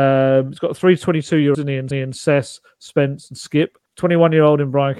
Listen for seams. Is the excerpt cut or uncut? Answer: cut